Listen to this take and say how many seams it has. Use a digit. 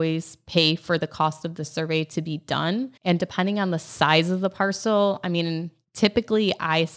1